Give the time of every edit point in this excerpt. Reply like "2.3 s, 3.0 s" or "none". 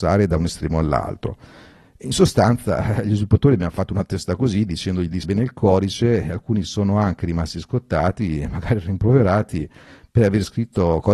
5.2 s